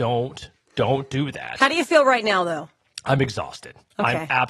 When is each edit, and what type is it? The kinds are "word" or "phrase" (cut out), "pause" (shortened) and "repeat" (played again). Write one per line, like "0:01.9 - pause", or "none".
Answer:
none